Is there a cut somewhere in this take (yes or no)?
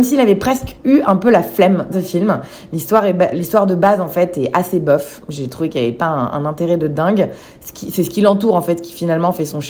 yes